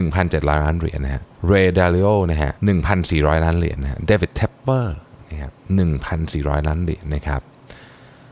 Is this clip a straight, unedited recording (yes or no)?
no